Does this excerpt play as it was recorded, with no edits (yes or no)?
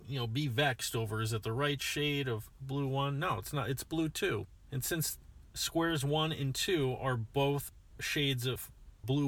no